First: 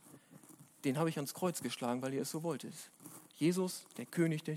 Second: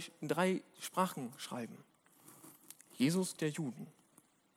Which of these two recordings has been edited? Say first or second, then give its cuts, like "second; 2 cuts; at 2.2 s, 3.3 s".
second; 1 cut; at 3.4 s